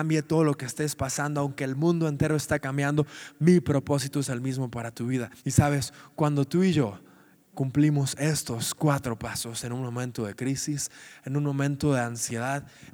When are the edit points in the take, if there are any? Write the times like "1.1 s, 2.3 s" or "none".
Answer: 5.4 s